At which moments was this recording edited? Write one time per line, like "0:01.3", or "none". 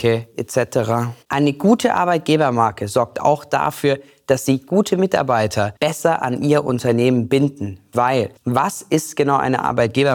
0:01.2
0:05.8
0:08.4